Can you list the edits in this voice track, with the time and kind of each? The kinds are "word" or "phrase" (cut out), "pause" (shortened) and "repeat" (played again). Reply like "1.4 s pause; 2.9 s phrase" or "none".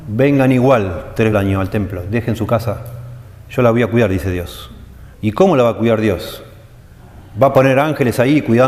1.3 s phrase; 5.1 s pause